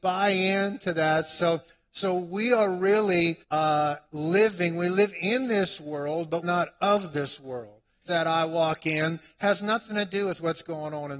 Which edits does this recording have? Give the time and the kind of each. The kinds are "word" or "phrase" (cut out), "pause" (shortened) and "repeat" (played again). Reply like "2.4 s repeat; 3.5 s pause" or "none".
3.4 s pause; 6.4 s word; 8.0 s phrase